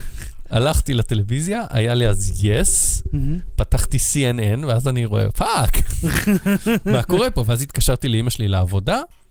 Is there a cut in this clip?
no; 0 cuts

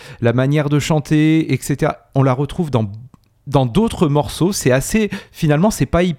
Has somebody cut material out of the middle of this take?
no; 0 cuts

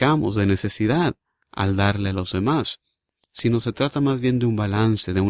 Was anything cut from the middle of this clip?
no; 0 cuts

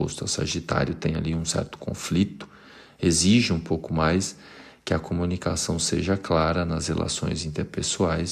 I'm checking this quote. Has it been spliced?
no; 0 cuts

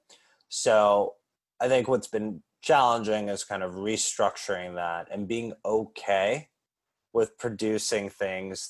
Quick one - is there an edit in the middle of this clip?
no; 0 cuts

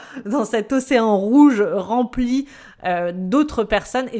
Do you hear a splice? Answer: no; 0 cuts

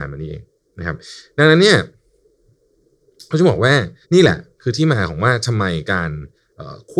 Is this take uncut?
no; 1 cut; at 4.0 s

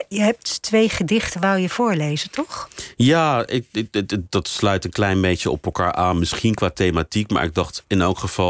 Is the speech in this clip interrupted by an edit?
no; 0 cuts

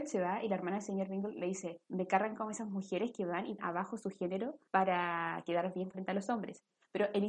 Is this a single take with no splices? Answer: no; 4 cuts; at 1.8 s, 3.6 s, 4.7 s, 5.9 s

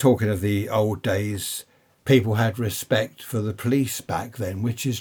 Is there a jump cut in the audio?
no; 0 cuts

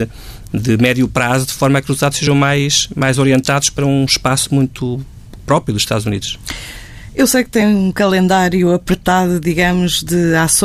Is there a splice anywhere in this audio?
no; 0 cuts

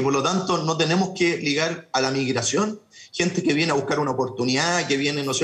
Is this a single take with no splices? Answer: yes; 0 cuts

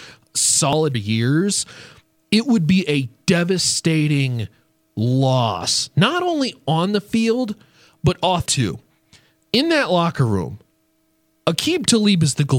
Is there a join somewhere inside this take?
yes; 2 cuts; at 0.9 s, 8.5 s

